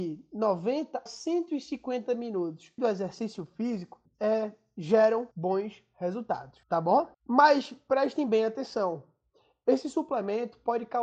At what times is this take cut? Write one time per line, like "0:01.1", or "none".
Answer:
0:01.1
0:02.8
0:04.1
0:05.3
0:06.6
0:07.1